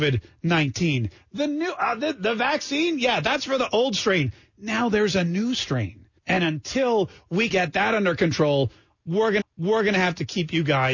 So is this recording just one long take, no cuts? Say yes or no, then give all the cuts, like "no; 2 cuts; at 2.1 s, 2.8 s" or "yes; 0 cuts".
no; 3 cuts; at 6.2 s, 7.5 s, 9.4 s